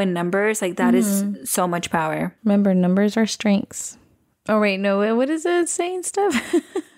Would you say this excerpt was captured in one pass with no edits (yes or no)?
yes